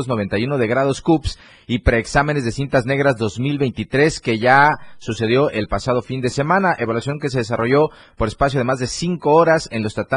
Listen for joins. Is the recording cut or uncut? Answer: uncut